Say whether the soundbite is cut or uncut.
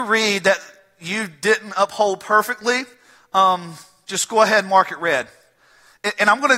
uncut